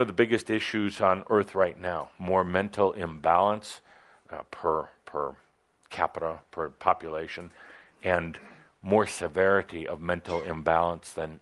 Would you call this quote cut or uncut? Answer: uncut